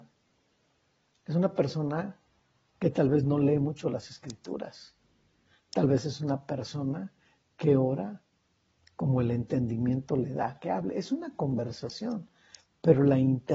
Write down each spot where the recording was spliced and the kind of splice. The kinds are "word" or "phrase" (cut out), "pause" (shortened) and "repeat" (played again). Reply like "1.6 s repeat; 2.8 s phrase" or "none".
none